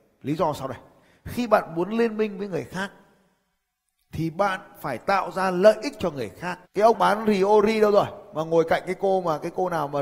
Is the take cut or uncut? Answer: cut